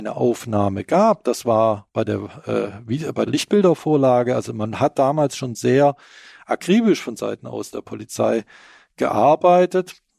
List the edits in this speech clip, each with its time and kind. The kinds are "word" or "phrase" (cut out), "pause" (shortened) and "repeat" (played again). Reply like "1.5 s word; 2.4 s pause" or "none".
3.3 s word